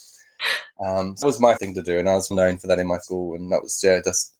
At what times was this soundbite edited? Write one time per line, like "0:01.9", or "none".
0:01.2
0:01.6
0:02.3
0:03.0